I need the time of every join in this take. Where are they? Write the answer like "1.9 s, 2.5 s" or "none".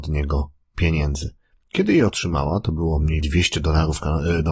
1.4 s, 3.2 s